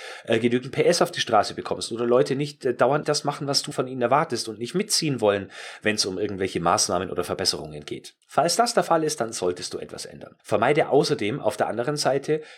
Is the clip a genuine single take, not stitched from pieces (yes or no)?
no